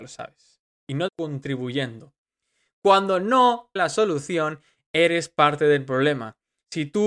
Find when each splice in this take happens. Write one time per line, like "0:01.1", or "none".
0:01.1
0:03.8

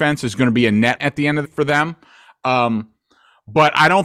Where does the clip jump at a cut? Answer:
0:01.0
0:01.4

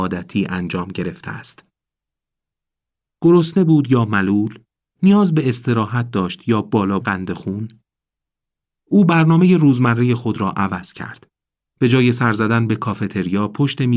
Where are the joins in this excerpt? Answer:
0:07.0

